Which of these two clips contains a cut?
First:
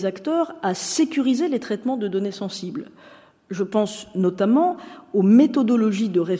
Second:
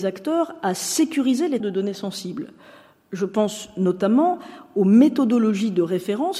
second; 1 cut; at 1.6 s

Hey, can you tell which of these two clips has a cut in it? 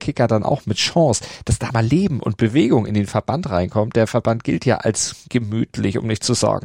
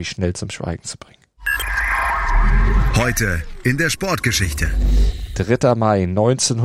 first; 1 cut; at 1.7 s

